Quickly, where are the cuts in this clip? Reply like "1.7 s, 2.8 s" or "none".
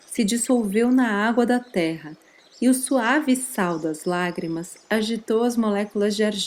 none